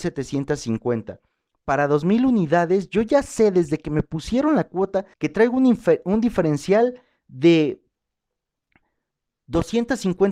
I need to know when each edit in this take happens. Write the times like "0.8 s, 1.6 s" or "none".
5.1 s